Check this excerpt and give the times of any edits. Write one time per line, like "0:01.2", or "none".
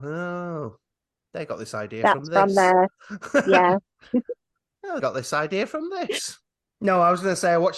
0:05.0